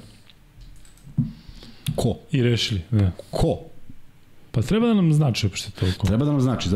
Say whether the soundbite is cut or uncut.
cut